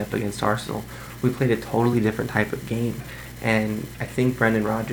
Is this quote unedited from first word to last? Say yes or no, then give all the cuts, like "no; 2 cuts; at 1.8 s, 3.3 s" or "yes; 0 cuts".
yes; 0 cuts